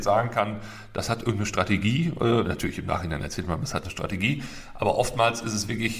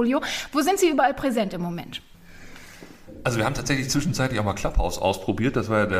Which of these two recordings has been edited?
first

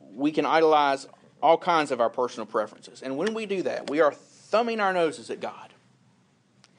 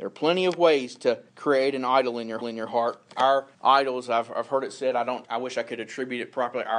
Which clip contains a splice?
second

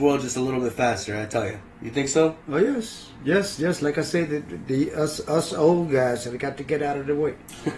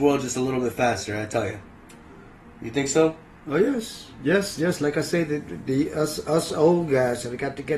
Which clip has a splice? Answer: first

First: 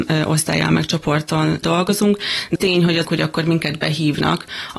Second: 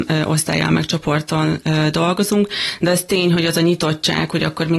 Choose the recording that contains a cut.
first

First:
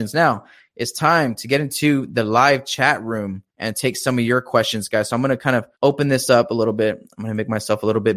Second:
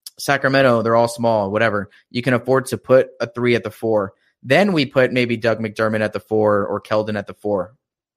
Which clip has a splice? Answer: first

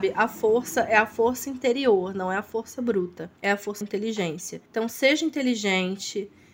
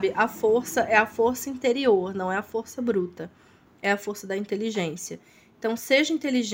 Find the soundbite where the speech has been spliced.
first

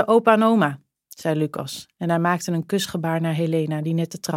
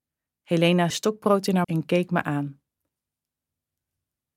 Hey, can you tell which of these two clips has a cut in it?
second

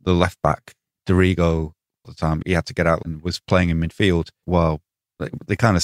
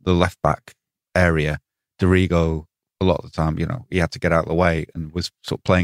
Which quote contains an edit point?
first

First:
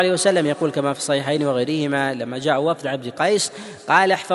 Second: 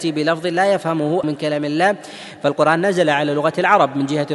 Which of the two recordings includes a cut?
second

